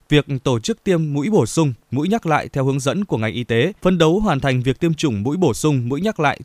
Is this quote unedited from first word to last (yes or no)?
no